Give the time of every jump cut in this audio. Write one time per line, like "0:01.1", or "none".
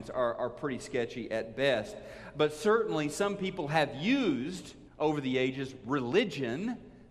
0:04.9